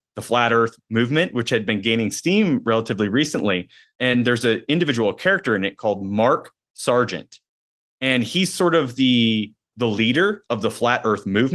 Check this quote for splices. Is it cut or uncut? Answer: cut